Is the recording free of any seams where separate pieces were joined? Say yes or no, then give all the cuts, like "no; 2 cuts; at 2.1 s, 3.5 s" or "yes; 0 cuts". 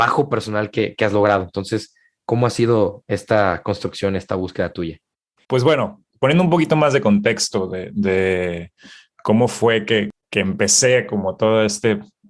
yes; 0 cuts